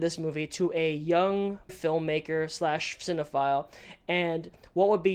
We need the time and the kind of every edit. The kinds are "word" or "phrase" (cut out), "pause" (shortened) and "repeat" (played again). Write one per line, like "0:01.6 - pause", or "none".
0:01.7 - word